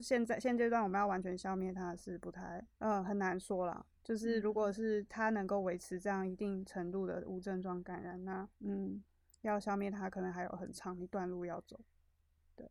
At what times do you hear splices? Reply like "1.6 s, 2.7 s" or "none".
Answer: 2.7 s, 4.0 s, 8.5 s